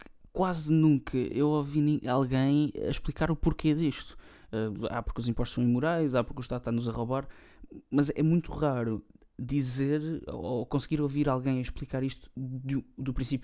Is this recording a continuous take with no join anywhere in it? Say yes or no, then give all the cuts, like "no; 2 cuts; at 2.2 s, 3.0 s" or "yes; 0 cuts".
yes; 0 cuts